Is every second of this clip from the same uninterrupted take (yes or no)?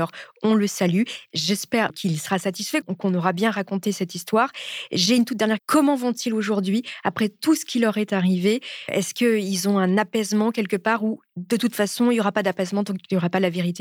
no